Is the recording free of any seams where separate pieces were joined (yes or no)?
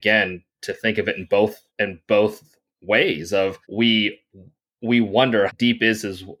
no